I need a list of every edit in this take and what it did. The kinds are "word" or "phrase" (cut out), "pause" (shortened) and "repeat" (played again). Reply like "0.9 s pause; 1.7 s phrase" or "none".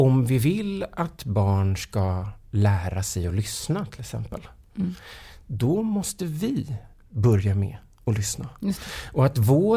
none